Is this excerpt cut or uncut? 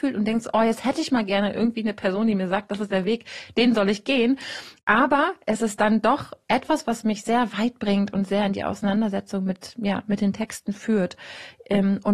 uncut